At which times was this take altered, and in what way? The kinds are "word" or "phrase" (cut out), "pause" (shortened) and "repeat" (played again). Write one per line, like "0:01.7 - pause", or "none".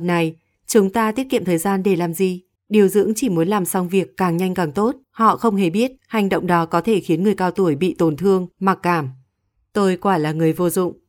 0:02.6 - pause
0:05.0 - pause
0:06.0 - pause
0:08.5 - pause